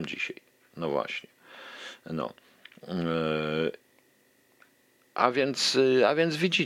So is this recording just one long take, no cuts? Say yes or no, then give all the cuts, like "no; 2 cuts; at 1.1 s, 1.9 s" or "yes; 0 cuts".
yes; 0 cuts